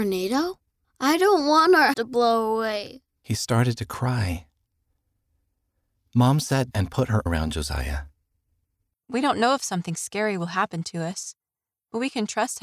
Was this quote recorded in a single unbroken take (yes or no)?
no